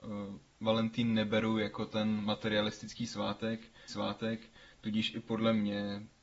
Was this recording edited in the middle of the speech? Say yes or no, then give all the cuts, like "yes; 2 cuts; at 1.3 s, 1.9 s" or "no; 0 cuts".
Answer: yes; 1 cut; at 3.9 s